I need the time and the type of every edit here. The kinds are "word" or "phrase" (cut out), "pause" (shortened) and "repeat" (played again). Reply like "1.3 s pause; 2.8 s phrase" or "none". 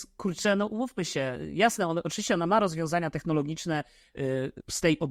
none

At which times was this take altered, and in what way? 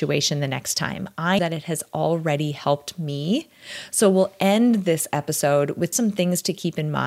1.4 s word; 5.9 s word

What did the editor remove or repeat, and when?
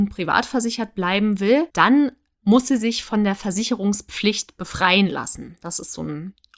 1.7 s pause

